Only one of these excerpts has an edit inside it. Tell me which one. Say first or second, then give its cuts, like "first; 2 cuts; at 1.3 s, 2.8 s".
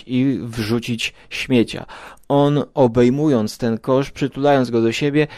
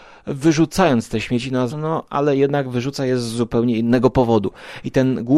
second; 1 cut; at 1.7 s